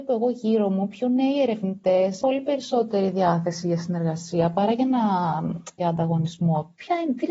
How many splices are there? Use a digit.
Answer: 2